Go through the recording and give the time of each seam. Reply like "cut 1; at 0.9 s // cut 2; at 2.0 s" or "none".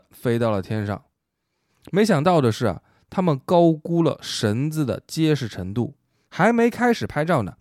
none